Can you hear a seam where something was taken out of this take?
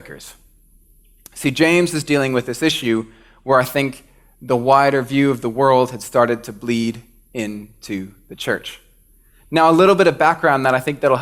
no; 0 cuts

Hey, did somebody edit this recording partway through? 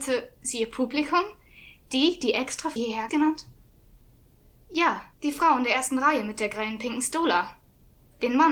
yes; 3 cuts; at 2.8 s, 3.1 s, 5.1 s

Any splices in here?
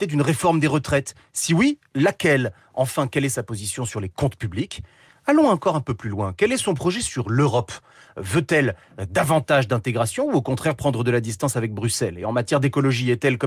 no; 0 cuts

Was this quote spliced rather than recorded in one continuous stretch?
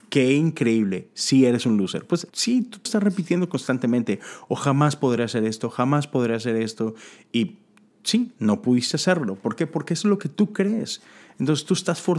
yes; 2 cuts; at 2.3 s, 2.9 s

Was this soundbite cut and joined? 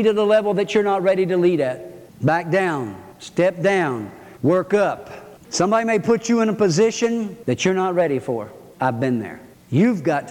no; 0 cuts

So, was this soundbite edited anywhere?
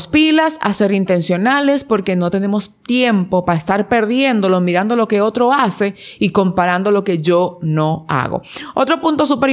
no; 0 cuts

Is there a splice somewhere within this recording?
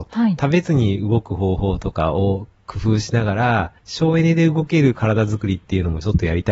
yes; 1 cut; at 3.8 s

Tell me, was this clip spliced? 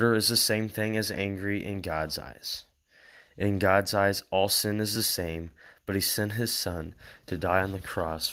no; 0 cuts

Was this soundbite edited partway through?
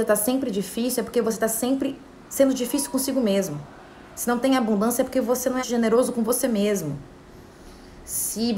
yes; 2 cuts; at 2.1 s, 5.6 s

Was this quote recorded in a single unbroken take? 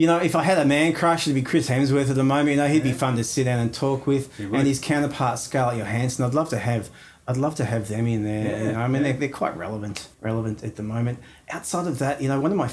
no; 1 cut; at 10.1 s

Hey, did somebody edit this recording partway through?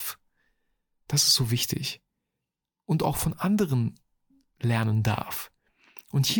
no; 0 cuts

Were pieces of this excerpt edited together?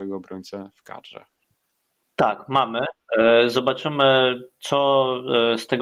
no; 0 cuts

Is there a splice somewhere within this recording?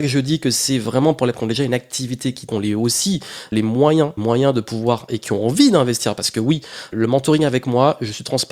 yes; 6 cuts; at 1.3 s, 2.5 s, 3.5 s, 4.2 s, 5.1 s, 6.9 s

